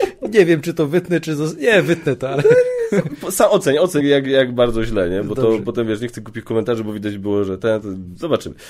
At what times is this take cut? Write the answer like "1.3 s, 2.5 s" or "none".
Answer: 4.0 s